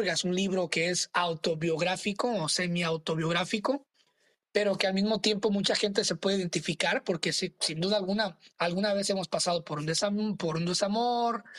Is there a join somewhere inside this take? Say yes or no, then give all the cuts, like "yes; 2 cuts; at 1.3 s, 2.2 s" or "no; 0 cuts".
no; 0 cuts